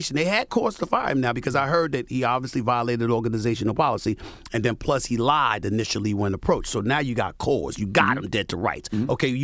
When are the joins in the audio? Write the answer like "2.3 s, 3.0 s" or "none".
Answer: none